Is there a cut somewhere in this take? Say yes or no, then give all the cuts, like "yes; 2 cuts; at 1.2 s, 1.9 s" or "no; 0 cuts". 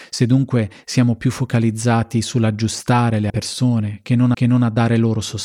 yes; 2 cuts; at 3.3 s, 4.3 s